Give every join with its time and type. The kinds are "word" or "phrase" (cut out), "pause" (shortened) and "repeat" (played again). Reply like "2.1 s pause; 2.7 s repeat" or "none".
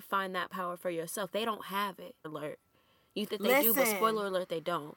1.3 s word; 2.2 s word; 3.3 s word